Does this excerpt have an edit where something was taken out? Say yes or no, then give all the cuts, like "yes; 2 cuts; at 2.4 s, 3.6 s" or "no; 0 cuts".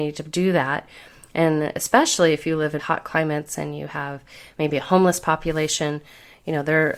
yes; 1 cut; at 2.8 s